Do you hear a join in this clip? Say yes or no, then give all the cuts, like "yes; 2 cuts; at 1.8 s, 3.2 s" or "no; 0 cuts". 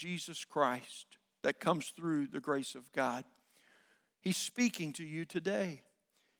no; 0 cuts